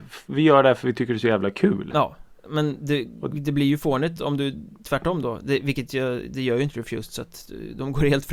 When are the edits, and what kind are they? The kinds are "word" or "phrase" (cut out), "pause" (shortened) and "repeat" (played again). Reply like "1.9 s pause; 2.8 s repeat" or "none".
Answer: none